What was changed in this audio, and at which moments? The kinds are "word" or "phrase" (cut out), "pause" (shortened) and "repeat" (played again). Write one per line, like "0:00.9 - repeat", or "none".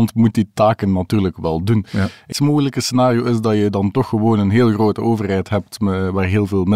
0:02.3 - phrase